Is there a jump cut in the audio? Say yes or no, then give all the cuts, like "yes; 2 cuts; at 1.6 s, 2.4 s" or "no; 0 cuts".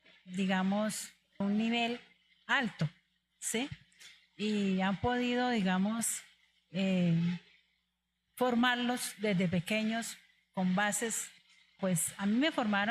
yes; 2 cuts; at 1.4 s, 11.8 s